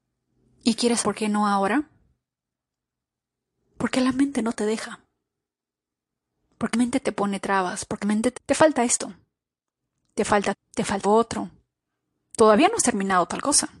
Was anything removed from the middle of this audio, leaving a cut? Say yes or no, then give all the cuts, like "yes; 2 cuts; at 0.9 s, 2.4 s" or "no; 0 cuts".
yes; 6 cuts; at 1.0 s, 6.7 s, 8.0 s, 8.4 s, 10.5 s, 11.0 s